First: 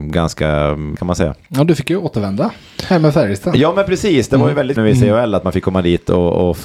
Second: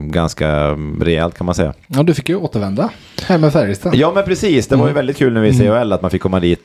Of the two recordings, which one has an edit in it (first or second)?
first